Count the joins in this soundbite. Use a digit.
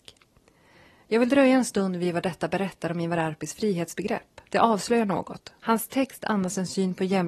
2